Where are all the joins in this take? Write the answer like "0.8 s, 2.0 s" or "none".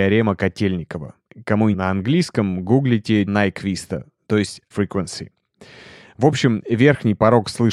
1.7 s, 3.3 s, 4.7 s